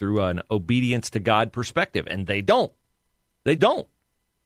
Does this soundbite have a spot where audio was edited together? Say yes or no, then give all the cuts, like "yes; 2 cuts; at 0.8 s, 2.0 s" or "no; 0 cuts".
yes; 1 cut; at 3.6 s